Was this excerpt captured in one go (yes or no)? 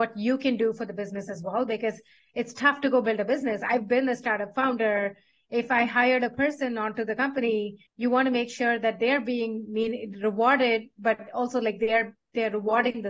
no